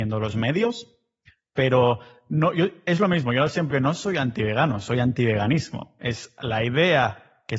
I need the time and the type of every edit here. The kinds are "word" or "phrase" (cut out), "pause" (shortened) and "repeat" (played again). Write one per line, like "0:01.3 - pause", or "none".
0:03.7 - word